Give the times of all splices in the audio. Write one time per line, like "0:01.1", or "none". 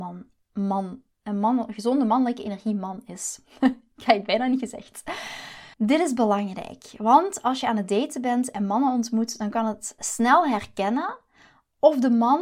0:01.1
0:05.7
0:10.0